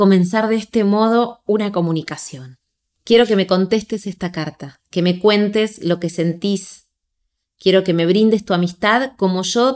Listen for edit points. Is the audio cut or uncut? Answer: uncut